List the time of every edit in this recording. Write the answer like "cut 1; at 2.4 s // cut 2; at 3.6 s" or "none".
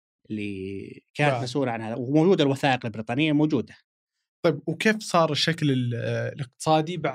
none